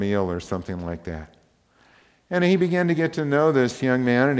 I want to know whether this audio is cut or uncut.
uncut